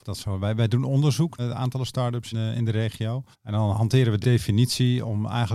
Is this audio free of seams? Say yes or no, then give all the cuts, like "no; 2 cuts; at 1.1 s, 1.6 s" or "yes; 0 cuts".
no; 5 cuts; at 1.4 s, 2.3 s, 3.3 s, 3.7 s, 4.2 s